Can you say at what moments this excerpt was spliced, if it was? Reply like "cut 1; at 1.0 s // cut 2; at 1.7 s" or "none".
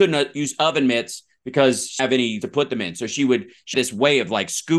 cut 1; at 2.0 s // cut 2; at 2.4 s // cut 3; at 3.7 s